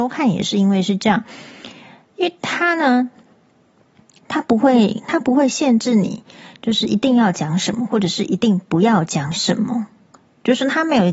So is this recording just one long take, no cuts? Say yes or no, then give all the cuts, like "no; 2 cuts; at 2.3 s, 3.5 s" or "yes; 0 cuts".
yes; 0 cuts